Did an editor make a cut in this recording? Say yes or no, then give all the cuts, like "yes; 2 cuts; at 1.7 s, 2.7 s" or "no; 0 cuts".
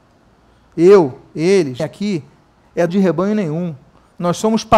yes; 2 cuts; at 1.8 s, 2.9 s